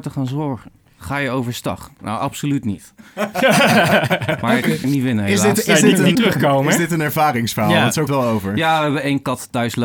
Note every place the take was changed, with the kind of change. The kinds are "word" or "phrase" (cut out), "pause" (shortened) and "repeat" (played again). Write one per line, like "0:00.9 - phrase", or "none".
0:04.8 - phrase
0:06.1 - word
0:08.1 - phrase

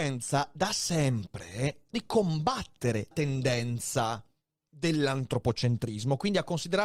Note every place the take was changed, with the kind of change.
0:01.9 - word
0:03.1 - word

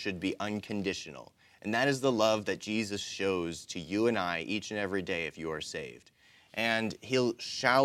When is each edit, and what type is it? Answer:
none

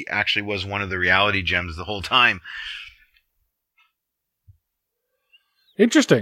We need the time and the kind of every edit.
none

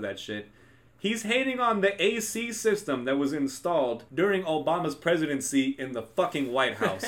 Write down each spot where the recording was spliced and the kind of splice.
0:04.1 - pause

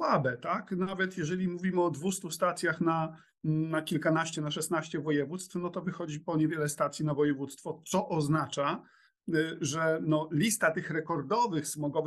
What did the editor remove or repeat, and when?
none

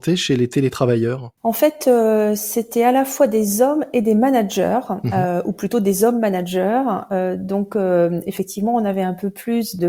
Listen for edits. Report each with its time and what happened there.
none

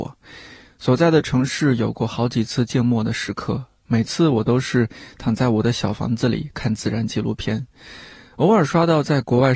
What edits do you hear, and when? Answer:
none

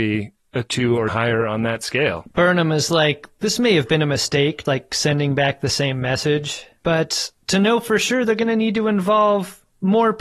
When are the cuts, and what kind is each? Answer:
0:01.1 - word
0:04.7 - word

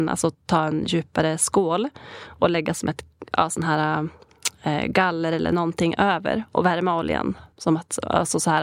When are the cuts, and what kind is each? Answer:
0:07.5 - pause

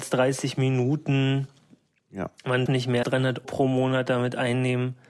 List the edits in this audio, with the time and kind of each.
0:02.7 - word
0:03.0 - word
0:03.4 - word

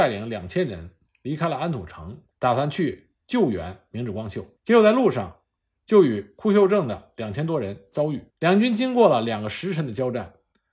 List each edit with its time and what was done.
0:02.3 - pause
0:04.6 - pause
0:08.3 - pause

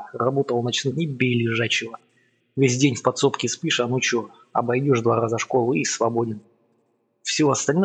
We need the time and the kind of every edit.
0:00.9 - word

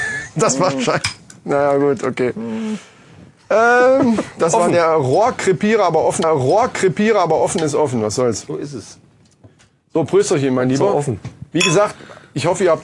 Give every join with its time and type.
0:06.2 - repeat

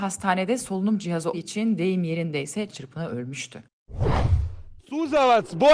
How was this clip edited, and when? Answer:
0:01.3 - word
0:02.7 - word
0:04.8 - pause

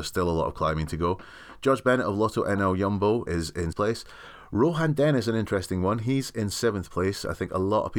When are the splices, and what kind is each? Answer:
0:03.3 - word
0:03.7 - word

